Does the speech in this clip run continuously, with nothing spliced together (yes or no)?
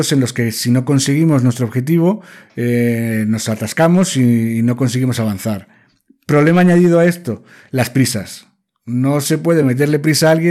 yes